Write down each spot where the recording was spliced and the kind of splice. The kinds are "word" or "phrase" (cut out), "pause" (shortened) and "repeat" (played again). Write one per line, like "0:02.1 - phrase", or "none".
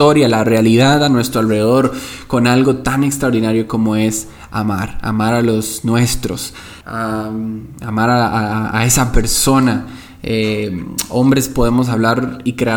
0:06.8 - pause